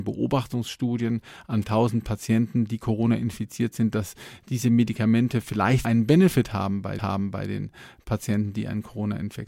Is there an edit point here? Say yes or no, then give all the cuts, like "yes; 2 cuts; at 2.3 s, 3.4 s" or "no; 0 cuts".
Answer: yes; 3 cuts; at 1.6 s, 5.8 s, 7.0 s